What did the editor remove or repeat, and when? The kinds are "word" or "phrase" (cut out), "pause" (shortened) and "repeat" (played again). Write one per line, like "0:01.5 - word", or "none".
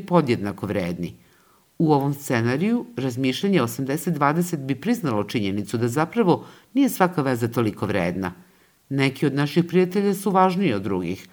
none